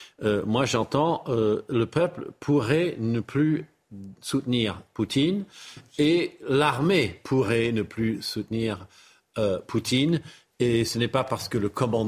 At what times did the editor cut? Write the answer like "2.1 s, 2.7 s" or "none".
none